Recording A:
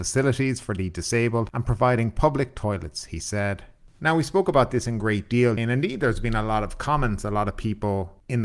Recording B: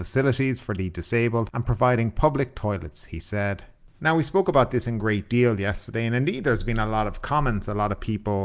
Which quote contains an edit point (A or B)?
A